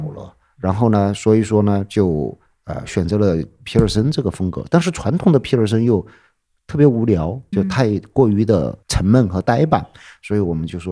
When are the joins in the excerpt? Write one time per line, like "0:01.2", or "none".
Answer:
0:07.5
0:08.8